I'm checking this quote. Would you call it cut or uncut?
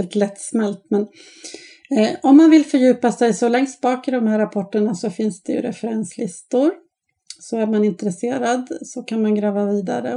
uncut